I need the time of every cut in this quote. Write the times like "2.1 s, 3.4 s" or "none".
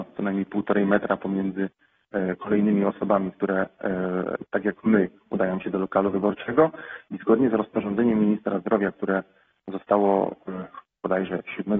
none